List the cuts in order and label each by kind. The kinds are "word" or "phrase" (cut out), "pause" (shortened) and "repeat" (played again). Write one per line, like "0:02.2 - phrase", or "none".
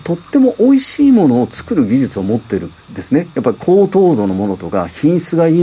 0:02.8 - pause